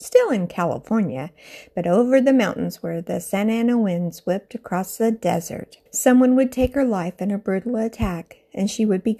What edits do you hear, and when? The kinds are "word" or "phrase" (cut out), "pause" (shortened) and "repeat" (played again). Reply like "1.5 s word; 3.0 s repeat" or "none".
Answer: 5.9 s pause